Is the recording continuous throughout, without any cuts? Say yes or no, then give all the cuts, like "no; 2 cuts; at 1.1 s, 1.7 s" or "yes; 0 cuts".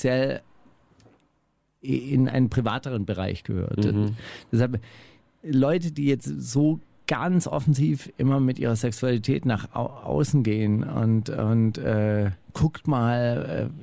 yes; 0 cuts